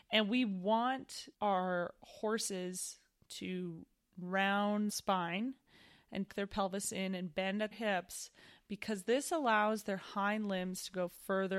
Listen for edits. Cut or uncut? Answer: cut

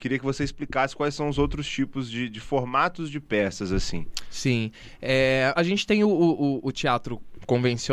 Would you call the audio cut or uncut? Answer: cut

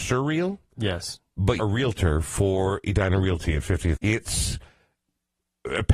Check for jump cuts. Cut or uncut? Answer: cut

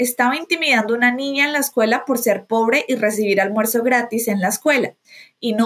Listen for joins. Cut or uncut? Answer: uncut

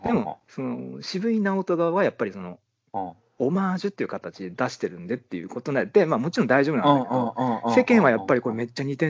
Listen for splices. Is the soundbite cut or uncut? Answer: uncut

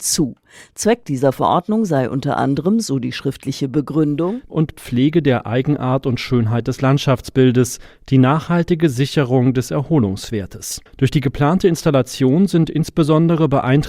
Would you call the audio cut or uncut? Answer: cut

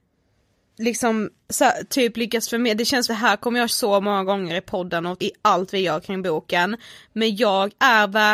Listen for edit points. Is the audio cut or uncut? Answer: cut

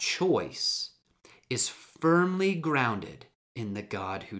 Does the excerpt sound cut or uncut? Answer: uncut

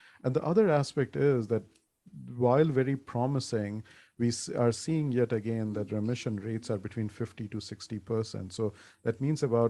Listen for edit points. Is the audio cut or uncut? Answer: uncut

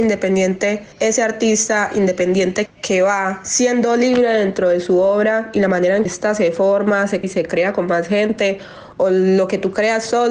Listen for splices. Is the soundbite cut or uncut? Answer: cut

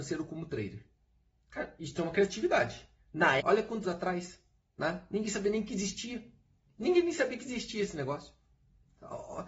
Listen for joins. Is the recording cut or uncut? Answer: cut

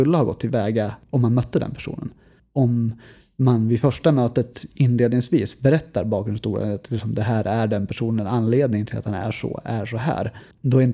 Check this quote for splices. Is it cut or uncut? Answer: uncut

